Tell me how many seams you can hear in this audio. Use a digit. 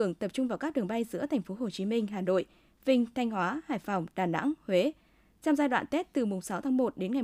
0